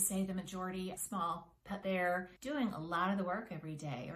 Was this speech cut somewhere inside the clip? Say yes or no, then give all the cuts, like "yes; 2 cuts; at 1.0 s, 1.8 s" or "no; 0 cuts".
yes; 3 cuts; at 1.0 s, 1.8 s, 2.4 s